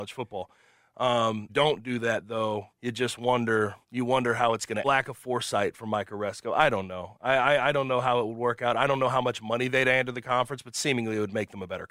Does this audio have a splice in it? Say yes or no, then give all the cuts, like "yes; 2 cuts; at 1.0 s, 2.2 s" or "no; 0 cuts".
yes; 4 cuts; at 1.5 s, 2.7 s, 3.8 s, 4.8 s